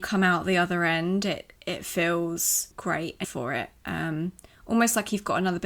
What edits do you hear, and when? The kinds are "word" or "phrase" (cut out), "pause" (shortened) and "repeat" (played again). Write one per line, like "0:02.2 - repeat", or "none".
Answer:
0:01.6 - pause
0:02.7 - pause
0:03.2 - phrase

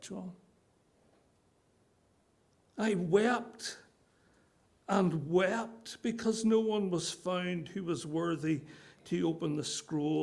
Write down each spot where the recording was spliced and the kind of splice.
none

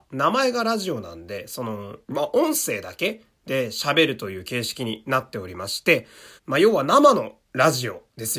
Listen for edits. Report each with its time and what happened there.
0:02.0 - pause
0:06.4 - pause
0:07.4 - pause

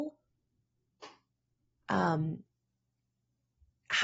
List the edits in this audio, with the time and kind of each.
none

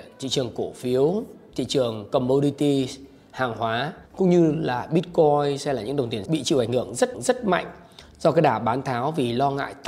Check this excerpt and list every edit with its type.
0:04.1 - pause
0:06.3 - word
0:07.1 - repeat

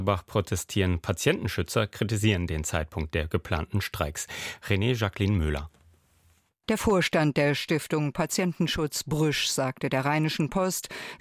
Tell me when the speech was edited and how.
none

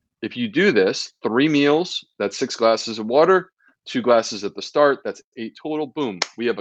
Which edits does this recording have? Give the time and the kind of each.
none

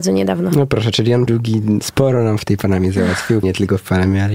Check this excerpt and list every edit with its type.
0:01.3 - word
0:03.4 - word

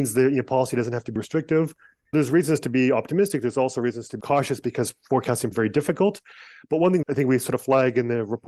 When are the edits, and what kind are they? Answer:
0:01.2 - word
0:02.1 - word
0:04.2 - word
0:05.5 - word
0:07.0 - word

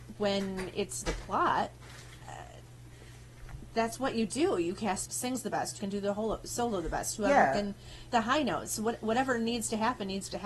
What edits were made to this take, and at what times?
0:01.0 - phrase
0:05.0 - phrase
0:05.8 - word
0:08.1 - word

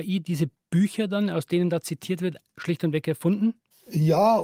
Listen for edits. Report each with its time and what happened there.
none

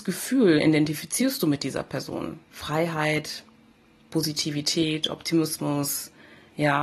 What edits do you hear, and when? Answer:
0:02.4 - pause

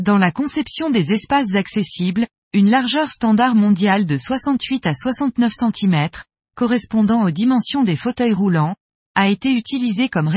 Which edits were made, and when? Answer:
none

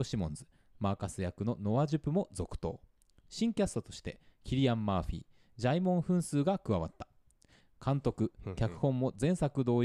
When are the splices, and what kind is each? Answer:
none

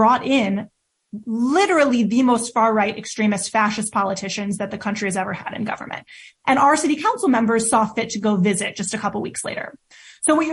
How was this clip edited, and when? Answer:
none

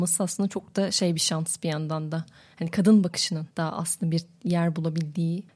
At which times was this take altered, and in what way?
none

